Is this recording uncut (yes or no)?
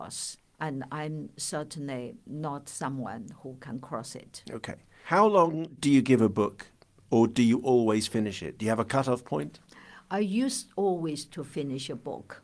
yes